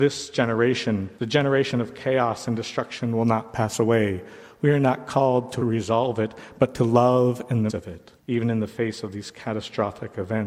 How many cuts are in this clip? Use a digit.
4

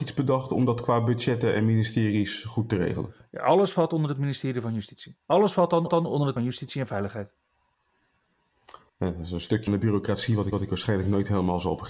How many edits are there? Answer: 6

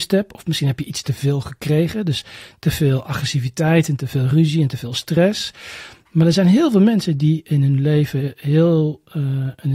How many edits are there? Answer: 0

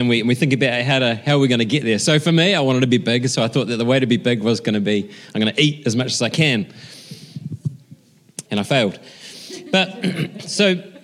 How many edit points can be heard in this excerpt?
1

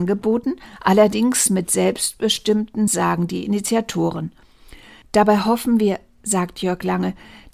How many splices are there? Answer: 1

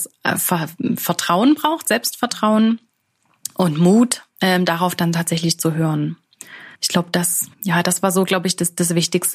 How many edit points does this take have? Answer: 2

